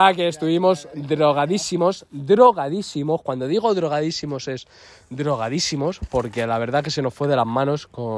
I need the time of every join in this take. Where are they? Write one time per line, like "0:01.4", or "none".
none